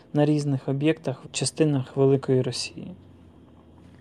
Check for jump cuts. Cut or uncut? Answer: cut